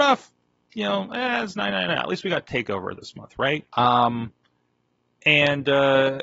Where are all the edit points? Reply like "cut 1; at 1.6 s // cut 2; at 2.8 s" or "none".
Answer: cut 1; at 3.7 s